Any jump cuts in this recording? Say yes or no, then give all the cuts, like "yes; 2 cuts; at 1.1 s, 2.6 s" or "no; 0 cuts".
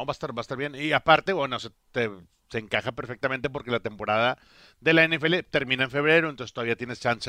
no; 0 cuts